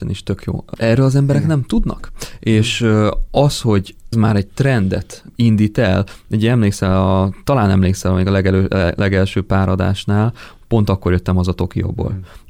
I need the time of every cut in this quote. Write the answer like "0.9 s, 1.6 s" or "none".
4.1 s